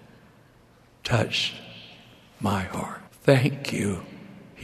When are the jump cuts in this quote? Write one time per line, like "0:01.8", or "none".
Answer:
0:03.1

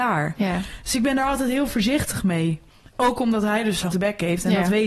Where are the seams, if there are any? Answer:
0:03.9

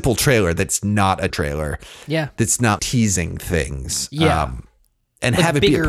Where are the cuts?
0:01.3
0:02.8

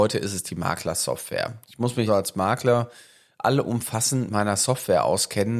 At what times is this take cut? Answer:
0:02.1
0:04.3

